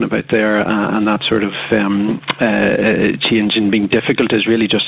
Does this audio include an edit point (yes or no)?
no